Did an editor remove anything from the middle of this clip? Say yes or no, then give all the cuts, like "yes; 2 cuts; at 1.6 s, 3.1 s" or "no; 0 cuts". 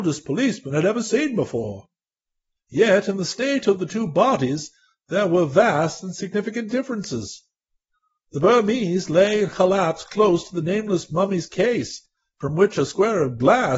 no; 0 cuts